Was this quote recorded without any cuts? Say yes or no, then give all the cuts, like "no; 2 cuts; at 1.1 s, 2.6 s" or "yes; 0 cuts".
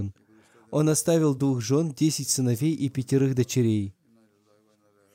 yes; 0 cuts